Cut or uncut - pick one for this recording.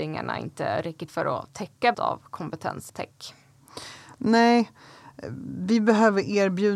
cut